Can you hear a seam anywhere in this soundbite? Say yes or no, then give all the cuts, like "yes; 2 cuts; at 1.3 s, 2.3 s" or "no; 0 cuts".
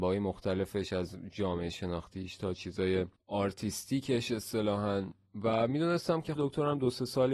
yes; 3 cuts; at 3.2 s, 5.3 s, 6.4 s